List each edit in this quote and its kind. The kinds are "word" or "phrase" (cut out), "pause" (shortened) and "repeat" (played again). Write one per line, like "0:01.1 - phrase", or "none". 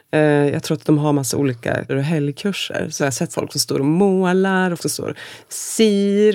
0:01.9 - word
0:03.0 - word
0:03.3 - word
0:04.8 - word